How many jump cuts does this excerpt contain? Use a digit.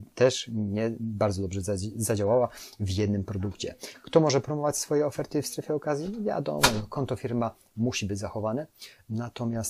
0